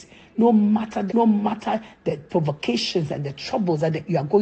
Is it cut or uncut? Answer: cut